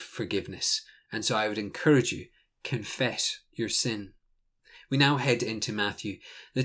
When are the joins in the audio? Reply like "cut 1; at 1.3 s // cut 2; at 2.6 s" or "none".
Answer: none